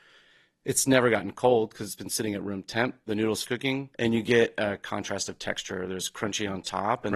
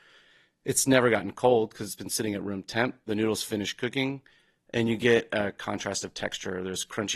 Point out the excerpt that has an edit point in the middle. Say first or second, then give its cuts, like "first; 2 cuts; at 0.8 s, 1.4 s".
first; 2 cuts; at 3.4 s, 3.9 s